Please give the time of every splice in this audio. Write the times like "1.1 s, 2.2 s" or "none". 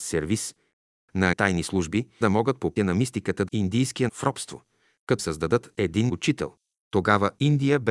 1.3 s, 2.2 s, 2.8 s, 3.5 s, 4.1 s, 5.2 s, 6.1 s